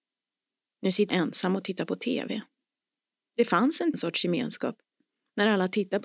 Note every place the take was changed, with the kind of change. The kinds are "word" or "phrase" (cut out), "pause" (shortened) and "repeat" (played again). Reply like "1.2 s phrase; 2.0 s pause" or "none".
1.1 s word; 2.6 s pause; 3.9 s phrase